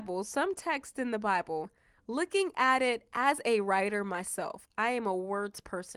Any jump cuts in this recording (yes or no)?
no